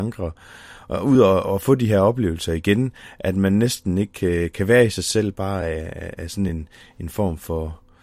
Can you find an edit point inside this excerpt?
no; 0 cuts

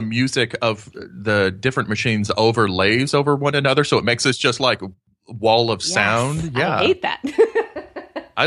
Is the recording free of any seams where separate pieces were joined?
yes; 0 cuts

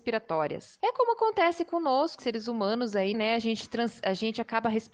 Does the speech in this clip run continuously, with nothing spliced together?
no; 2 cuts; at 2.2 s, 3.1 s

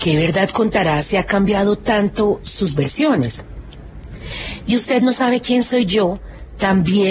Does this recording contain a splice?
no; 0 cuts

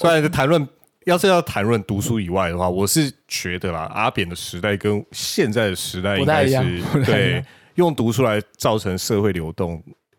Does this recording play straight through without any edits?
yes; 0 cuts

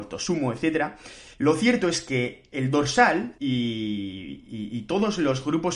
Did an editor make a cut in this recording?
yes; 2 cuts; at 1.3 s, 3.4 s

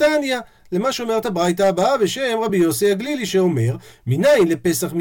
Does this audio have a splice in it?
no; 0 cuts

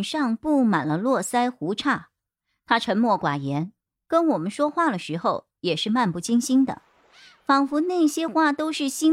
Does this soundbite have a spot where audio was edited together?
no; 0 cuts

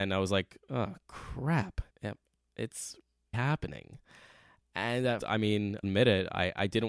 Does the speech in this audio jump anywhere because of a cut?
yes; 4 cuts; at 1.9 s, 3.3 s, 5.2 s, 5.8 s

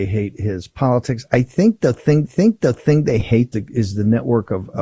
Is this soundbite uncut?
no; 2 cuts; at 2.2 s, 3.5 s

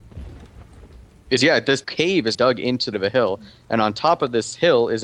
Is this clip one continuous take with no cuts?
no; 4 cuts; at 1.4 s, 1.8 s, 2.3 s, 2.9 s

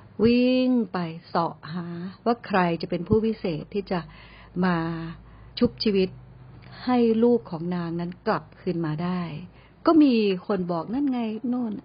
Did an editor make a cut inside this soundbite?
yes; 2 cuts; at 5.5 s, 9.6 s

